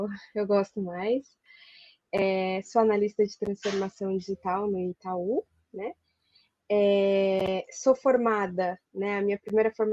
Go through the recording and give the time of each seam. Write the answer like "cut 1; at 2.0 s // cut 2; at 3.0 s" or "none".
none